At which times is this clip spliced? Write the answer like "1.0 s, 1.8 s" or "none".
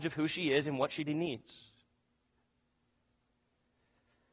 1.1 s